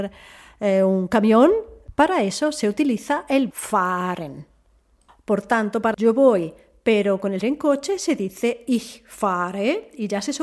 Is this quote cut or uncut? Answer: cut